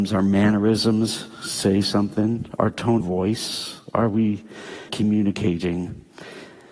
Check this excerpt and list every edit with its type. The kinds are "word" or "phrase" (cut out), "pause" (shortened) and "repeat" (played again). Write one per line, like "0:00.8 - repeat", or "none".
0:03.0 - word
0:04.9 - word